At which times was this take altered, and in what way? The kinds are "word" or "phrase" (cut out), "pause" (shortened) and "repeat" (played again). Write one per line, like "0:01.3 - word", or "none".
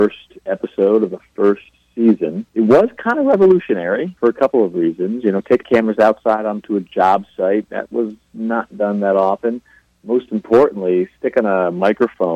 0:02.5 - pause
0:04.2 - word
0:05.6 - word